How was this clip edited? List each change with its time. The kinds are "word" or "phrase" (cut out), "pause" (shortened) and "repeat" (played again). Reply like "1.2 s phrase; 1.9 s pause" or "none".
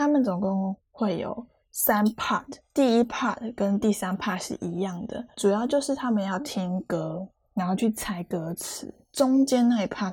none

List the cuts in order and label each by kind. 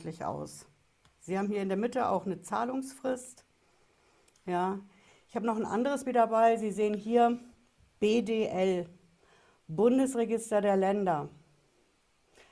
6.1 s word

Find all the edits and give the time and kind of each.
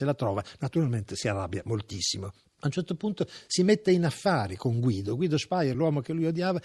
none

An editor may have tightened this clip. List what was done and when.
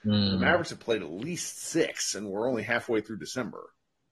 none

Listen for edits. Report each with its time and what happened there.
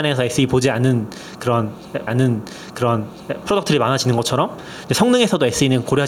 2.1 s repeat

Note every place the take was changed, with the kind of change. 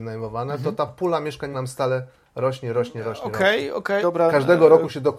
1.5 s word; 4.0 s word

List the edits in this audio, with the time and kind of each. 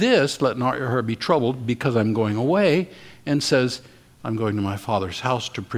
none

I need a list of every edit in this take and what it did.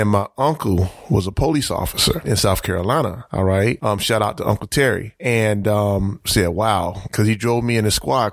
none

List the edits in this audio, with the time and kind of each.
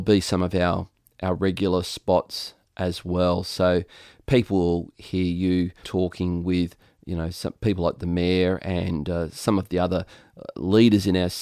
5.8 s word

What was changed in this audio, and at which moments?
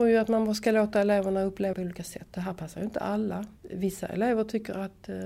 1.7 s word; 3.6 s pause

